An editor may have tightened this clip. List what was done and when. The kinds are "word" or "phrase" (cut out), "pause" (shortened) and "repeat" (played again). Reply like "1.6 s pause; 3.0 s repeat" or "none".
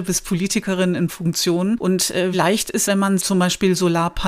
1.1 s word; 2.3 s word; 2.9 s word; 3.2 s word